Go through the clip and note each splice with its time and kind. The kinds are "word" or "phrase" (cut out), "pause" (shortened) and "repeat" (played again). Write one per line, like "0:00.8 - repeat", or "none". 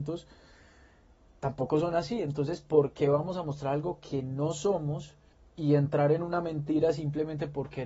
0:05.3 - pause